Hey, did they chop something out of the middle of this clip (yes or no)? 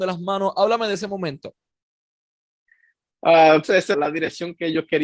yes